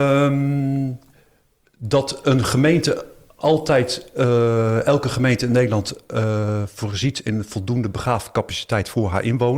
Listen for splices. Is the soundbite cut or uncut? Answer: uncut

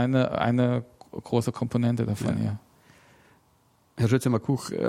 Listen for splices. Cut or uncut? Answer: uncut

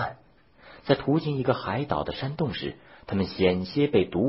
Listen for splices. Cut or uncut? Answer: uncut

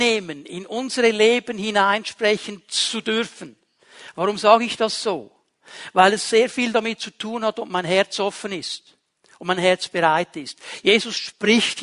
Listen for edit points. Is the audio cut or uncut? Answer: uncut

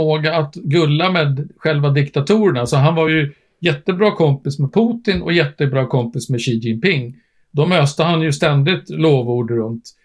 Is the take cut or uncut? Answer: uncut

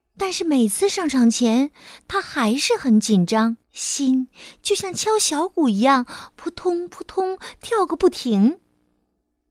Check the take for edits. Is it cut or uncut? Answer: cut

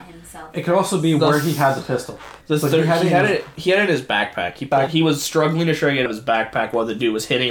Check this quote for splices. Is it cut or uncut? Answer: cut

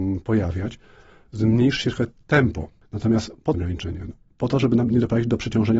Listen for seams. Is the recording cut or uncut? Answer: cut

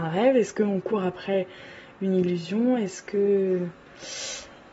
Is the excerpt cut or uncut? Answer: uncut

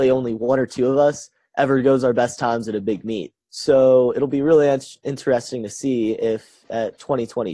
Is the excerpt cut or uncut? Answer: cut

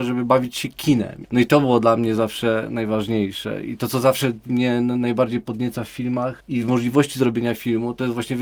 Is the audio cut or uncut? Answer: uncut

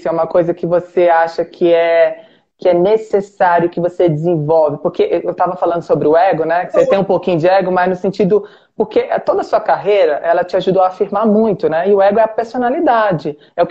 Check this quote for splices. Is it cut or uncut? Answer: uncut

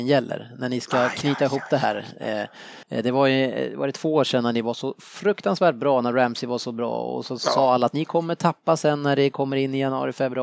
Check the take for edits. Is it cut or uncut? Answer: cut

